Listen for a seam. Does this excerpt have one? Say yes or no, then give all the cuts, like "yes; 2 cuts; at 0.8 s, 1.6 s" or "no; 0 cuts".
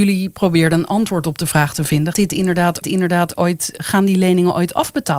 yes; 2 cuts; at 2.1 s, 2.8 s